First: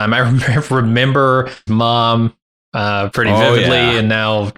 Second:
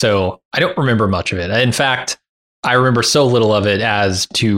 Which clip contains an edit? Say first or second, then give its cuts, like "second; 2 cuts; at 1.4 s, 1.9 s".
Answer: first; 2 cuts; at 1.7 s, 3.1 s